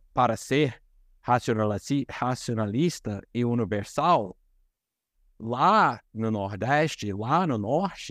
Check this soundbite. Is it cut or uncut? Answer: uncut